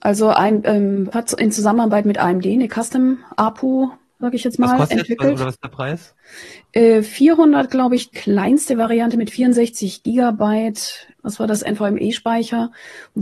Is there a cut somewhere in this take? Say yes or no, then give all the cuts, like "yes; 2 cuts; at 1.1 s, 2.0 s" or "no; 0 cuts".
yes; 3 cuts; at 1.1 s, 8.1 s, 11.1 s